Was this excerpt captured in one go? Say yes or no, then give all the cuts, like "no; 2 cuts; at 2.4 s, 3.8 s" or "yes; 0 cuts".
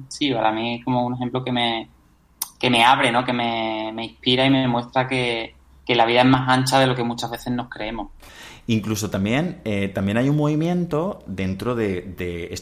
no; 1 cut; at 5.7 s